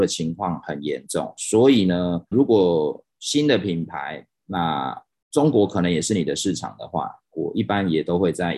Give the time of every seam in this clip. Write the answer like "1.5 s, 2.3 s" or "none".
2.3 s, 3.1 s, 5.1 s